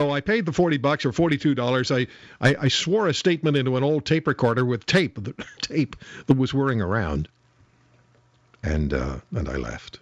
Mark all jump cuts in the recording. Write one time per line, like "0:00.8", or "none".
0:05.6

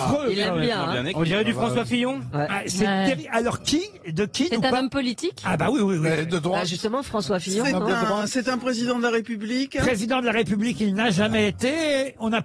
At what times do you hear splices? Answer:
none

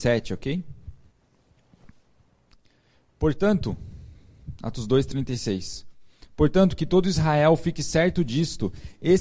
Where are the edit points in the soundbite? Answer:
none

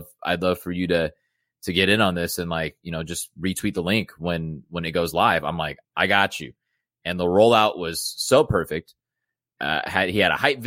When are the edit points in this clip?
0:05.8

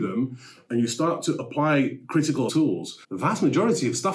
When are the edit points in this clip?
0:02.5
0:03.0

